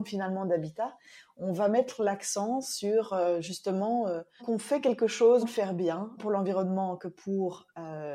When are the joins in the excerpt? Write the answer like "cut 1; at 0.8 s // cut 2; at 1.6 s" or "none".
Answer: cut 1; at 4.4 s // cut 2; at 5.4 s // cut 3; at 6.2 s